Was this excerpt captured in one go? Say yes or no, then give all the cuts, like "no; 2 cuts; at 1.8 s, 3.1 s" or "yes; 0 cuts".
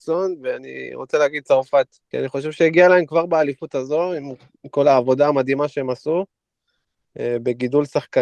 no; 1 cut; at 2.0 s